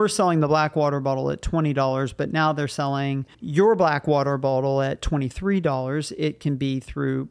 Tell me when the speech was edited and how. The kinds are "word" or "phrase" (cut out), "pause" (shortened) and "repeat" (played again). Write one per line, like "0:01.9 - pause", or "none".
0:03.3 - pause